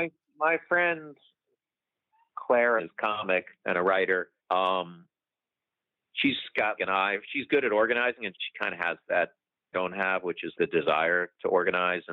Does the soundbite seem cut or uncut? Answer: cut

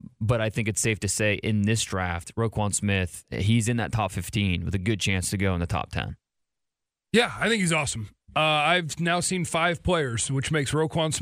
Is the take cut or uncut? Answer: uncut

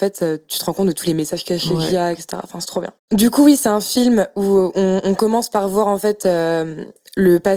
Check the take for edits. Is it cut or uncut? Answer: cut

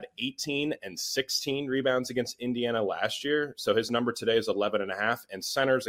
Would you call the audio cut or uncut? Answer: uncut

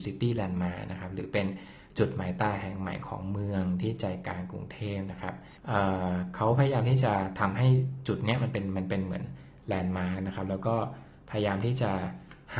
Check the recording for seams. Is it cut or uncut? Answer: cut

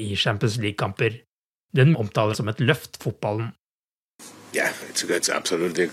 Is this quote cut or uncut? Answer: cut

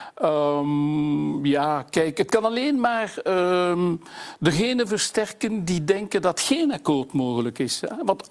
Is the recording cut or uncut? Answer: uncut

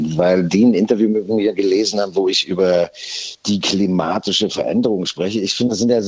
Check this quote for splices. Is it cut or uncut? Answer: uncut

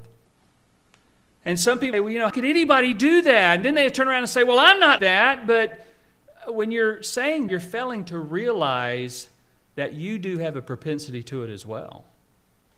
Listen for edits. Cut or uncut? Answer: cut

